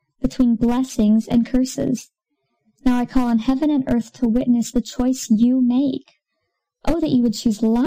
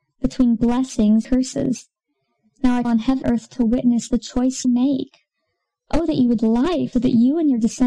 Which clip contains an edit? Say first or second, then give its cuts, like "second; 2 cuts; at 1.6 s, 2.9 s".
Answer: second; 6 cuts; at 1.2 s, 2.8 s, 3.2 s, 4.6 s, 6.4 s, 6.9 s